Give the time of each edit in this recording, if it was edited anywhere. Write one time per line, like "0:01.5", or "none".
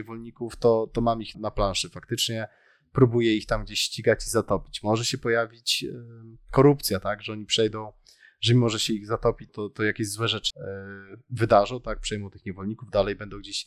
0:01.3
0:09.5
0:10.5